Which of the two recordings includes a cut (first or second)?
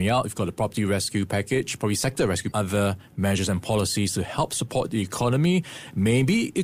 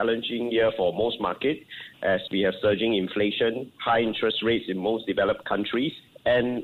first